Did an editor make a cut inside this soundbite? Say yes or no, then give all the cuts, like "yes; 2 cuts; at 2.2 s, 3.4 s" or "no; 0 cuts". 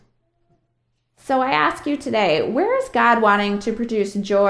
no; 0 cuts